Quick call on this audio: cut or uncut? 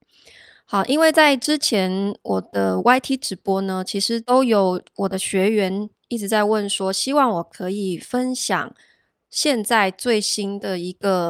uncut